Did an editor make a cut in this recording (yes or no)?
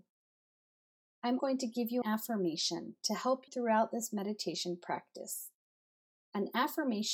yes